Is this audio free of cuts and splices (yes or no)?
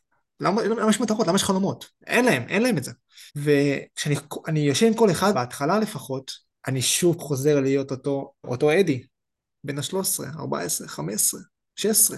no